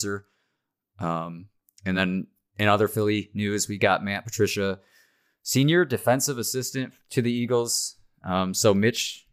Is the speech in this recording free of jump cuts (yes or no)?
yes